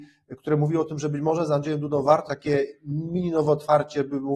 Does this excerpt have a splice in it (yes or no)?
yes